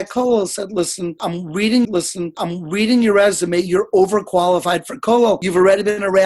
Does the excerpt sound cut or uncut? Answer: cut